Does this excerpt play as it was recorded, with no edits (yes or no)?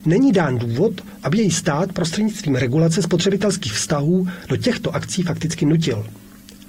yes